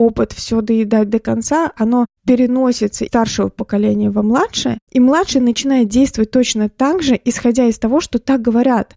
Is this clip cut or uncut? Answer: cut